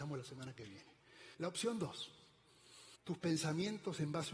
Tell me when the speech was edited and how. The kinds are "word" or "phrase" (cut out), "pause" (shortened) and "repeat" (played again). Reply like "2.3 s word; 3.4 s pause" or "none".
1.3 s pause; 3.0 s pause